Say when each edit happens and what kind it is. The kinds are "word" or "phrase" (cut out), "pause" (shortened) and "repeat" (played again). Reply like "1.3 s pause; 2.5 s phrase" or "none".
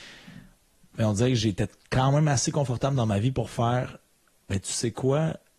none

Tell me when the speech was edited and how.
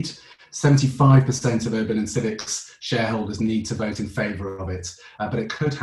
none

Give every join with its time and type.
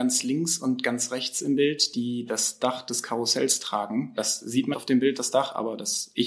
4.7 s word

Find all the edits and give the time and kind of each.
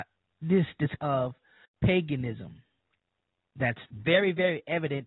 1.0 s word; 1.6 s word

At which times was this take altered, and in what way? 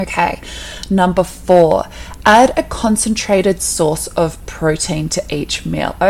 none

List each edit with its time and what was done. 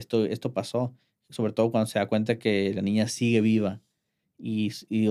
none

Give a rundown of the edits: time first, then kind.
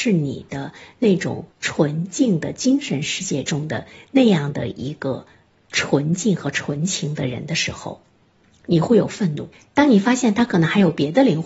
1.5 s pause; 9.5 s pause

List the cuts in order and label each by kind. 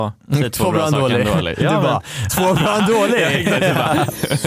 2.3 s word

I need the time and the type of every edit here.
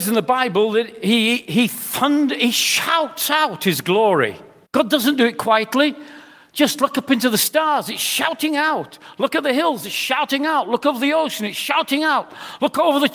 4.7 s pause

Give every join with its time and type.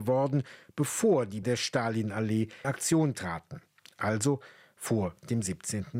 1.4 s word; 2.6 s word

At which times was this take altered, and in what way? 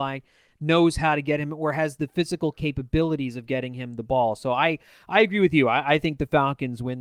none

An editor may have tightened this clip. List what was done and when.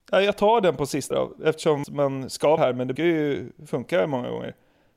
1.1 s word; 1.8 s word; 2.6 s phrase; 3.0 s word

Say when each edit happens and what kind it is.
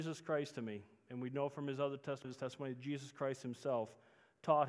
2.2 s word

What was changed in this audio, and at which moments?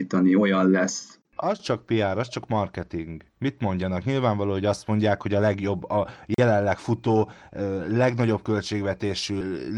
none

